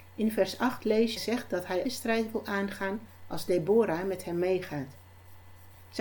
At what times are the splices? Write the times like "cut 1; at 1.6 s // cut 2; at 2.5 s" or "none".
cut 1; at 1.2 s // cut 2; at 1.8 s